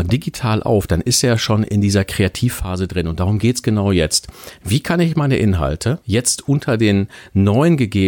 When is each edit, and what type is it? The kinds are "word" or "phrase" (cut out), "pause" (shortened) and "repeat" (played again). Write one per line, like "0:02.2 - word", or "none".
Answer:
0:06.0 - pause